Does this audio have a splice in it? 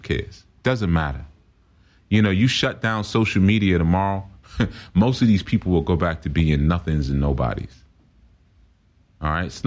no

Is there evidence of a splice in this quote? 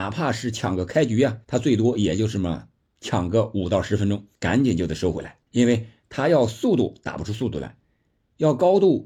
yes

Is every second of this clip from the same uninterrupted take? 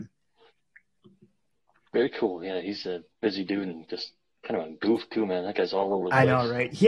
no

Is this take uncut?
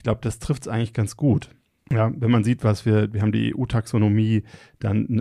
yes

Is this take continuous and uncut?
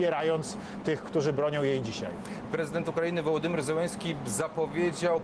yes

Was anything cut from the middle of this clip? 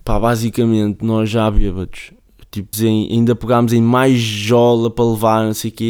yes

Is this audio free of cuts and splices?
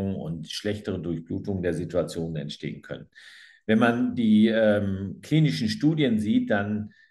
yes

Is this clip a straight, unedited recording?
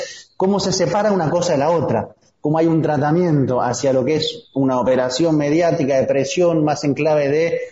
yes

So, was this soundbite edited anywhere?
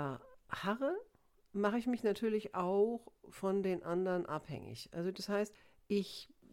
no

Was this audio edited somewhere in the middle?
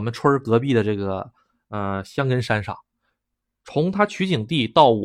no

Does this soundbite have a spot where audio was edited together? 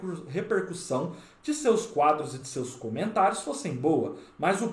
no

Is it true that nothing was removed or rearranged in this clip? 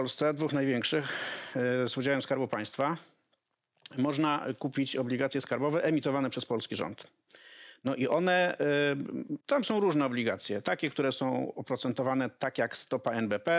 yes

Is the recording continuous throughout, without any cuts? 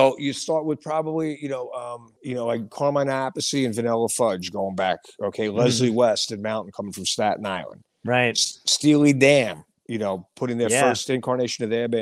no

